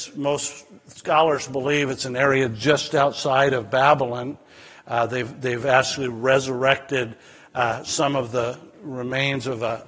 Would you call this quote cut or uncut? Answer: uncut